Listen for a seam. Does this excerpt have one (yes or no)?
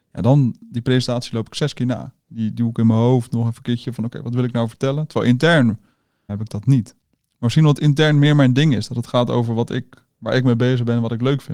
yes